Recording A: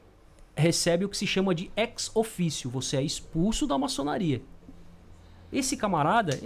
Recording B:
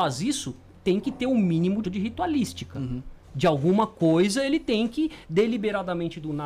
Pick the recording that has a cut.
B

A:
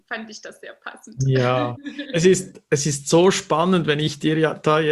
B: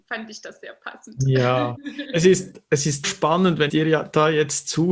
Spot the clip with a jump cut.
B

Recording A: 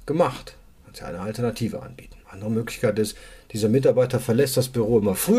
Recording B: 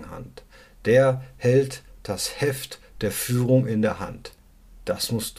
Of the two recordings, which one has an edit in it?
A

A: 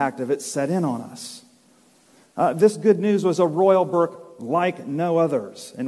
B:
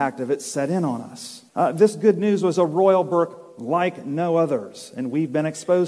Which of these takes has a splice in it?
B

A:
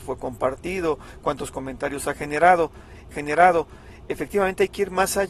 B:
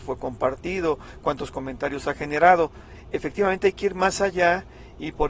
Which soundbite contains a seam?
A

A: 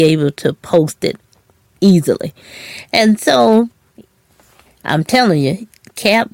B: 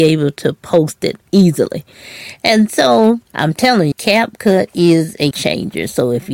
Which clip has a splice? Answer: B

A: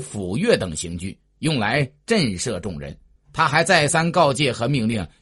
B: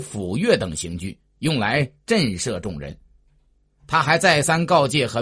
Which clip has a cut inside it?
A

